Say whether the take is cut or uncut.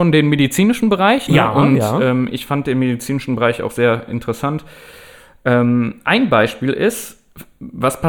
cut